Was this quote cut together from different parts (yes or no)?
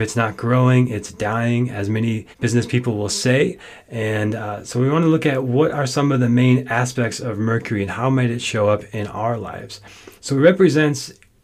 yes